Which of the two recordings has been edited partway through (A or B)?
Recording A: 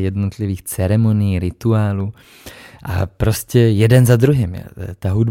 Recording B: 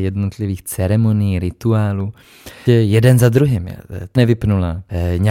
B